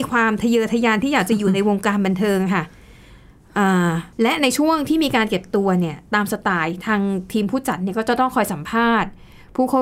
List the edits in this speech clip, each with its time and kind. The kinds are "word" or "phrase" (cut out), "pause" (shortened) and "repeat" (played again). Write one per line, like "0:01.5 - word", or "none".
0:04.1 - pause